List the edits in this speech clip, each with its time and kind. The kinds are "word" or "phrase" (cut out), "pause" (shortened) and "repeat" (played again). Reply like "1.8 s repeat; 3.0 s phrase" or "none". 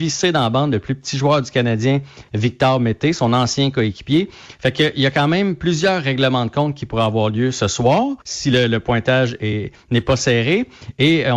8.2 s pause